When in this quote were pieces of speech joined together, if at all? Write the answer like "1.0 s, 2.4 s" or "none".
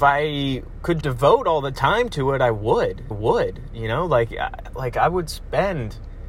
1.0 s, 3.1 s